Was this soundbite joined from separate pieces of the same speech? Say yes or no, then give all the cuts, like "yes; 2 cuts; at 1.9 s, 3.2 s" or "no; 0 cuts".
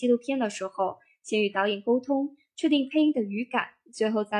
no; 0 cuts